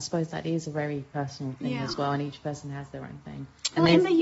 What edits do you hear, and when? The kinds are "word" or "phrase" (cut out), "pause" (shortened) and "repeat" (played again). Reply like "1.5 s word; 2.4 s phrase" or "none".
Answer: none